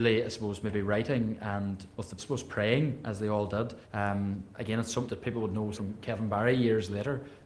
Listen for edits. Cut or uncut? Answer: cut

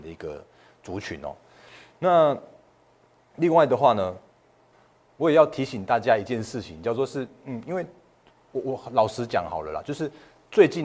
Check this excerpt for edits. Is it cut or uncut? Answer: uncut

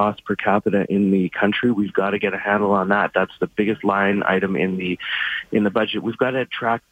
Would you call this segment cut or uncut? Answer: uncut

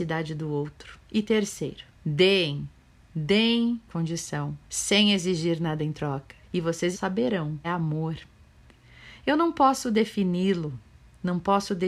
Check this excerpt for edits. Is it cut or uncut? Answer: cut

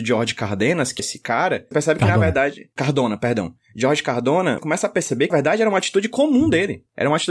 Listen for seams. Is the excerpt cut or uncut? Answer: cut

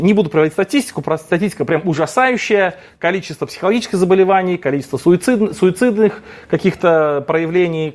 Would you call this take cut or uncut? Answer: uncut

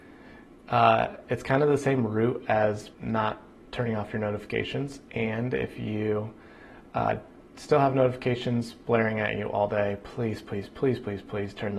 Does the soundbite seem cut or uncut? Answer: cut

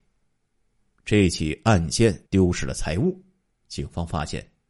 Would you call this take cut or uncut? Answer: cut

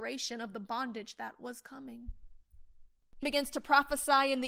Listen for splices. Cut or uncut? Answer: cut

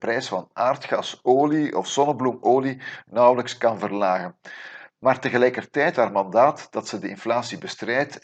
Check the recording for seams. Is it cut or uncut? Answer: cut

